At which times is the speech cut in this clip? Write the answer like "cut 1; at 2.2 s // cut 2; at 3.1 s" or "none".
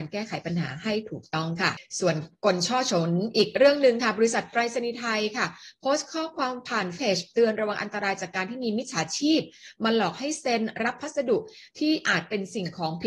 cut 1; at 7.0 s